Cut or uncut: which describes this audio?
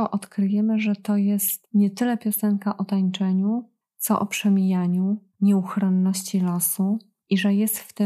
uncut